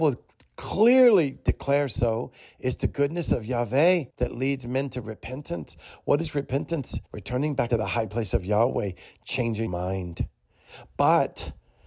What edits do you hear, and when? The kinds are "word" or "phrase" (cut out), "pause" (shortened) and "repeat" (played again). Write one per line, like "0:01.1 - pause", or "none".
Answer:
0:02.0 - word
0:04.1 - pause
0:07.1 - pause
0:07.7 - word
0:09.7 - word